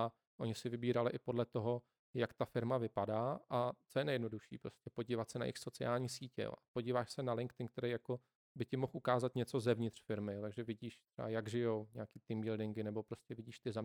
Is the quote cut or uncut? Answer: uncut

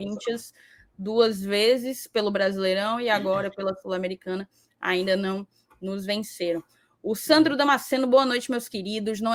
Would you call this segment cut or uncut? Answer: uncut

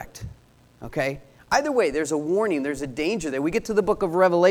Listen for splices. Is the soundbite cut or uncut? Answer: uncut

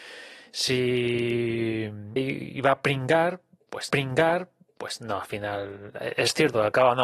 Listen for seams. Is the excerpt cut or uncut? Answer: cut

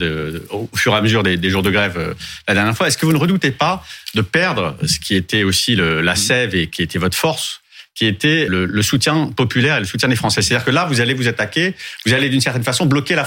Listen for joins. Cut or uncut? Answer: cut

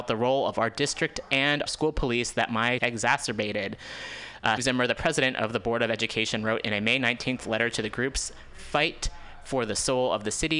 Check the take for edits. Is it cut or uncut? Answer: cut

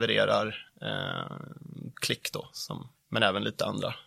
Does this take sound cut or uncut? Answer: cut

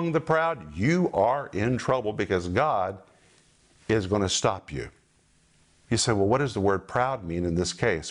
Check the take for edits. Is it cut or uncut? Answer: uncut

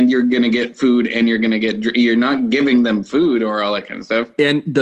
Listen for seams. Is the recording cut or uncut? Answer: uncut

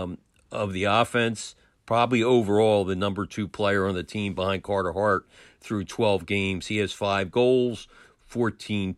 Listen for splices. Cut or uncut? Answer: uncut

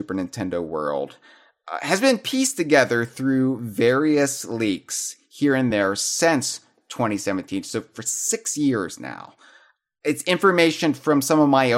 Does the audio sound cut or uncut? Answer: uncut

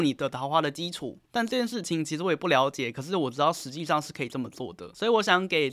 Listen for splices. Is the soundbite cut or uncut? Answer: cut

